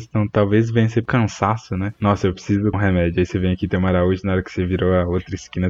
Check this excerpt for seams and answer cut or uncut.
cut